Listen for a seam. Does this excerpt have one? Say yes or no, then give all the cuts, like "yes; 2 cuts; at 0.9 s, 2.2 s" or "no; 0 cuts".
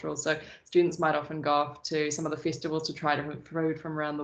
no; 0 cuts